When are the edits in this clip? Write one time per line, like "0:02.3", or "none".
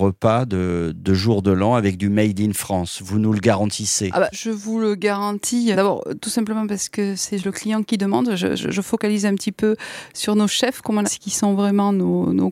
0:04.3
0:05.7
0:08.6
0:11.0

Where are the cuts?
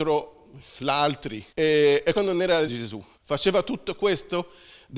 0:01.5
0:02.1
0:02.6
0:03.1

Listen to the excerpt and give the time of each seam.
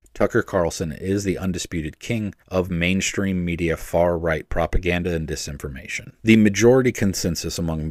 0:02.4
0:06.2

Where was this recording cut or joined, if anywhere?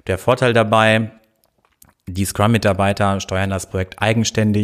none

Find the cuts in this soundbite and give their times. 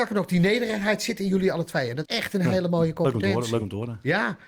0:02.1

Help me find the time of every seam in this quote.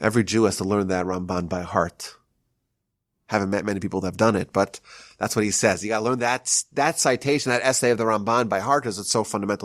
none

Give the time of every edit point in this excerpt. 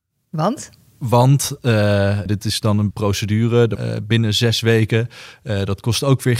0:02.3
0:02.9
0:03.8

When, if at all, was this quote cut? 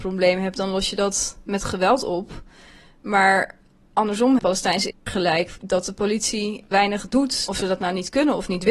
0:04.4
0:04.9
0:06.7

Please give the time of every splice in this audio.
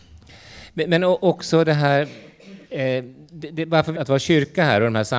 0:02.6
0:03.9

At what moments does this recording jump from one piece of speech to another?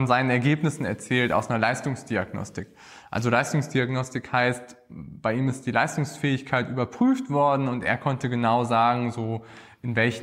none

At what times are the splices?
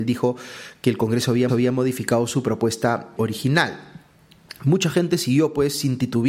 0:01.5
0:03.2

